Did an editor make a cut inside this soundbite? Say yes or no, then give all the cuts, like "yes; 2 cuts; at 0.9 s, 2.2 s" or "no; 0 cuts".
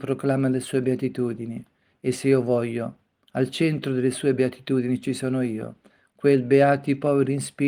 no; 0 cuts